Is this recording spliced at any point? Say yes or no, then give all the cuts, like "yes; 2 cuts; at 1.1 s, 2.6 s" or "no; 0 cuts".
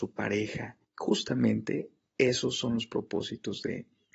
no; 0 cuts